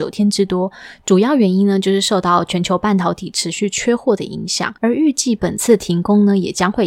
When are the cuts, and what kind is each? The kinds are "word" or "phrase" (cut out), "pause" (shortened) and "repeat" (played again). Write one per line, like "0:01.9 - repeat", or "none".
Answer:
0:04.8 - pause

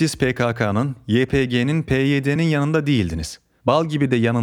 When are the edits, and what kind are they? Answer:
none

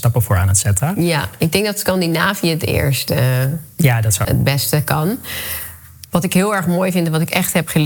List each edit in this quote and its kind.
0:04.2 - word

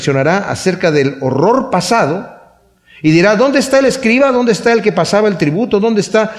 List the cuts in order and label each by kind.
none

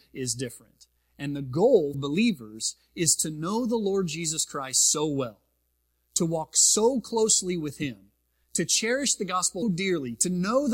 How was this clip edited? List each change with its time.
0:01.9 - word
0:09.6 - word

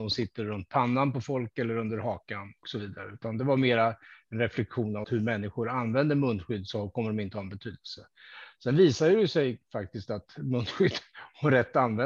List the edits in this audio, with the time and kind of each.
0:02.6 - word
0:05.0 - word

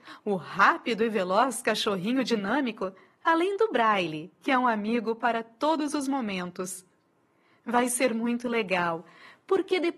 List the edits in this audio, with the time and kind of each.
none

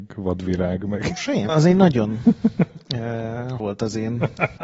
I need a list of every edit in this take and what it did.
0:01.5 - word
0:03.6 - word

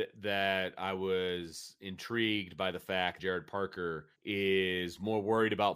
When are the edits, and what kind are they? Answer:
0:03.2 - word
0:04.1 - pause

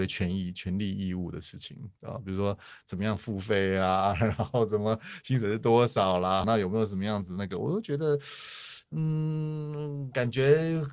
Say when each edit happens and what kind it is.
0:06.4 - word

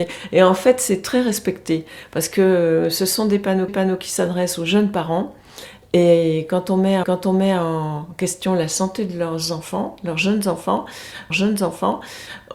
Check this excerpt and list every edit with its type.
0:03.7 - repeat
0:07.0 - repeat
0:11.3 - repeat

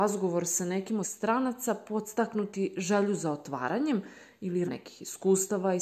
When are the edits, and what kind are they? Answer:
0:01.0 - phrase
0:04.7 - word

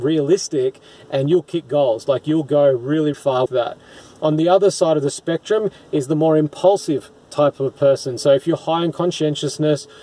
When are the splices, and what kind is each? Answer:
0:03.1 - word
0:03.5 - word

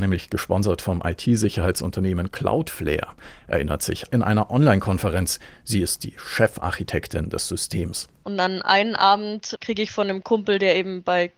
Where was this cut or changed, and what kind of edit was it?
0:04.1 - phrase

